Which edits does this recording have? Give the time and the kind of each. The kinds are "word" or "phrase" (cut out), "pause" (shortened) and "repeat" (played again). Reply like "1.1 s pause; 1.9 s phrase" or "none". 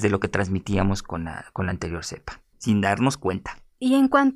none